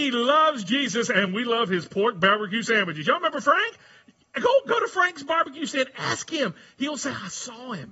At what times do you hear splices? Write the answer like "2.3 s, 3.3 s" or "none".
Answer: none